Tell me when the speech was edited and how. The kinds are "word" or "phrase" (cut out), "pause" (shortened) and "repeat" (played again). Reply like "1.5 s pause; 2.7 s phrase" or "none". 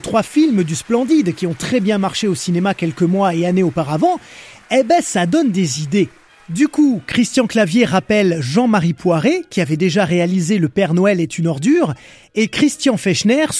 none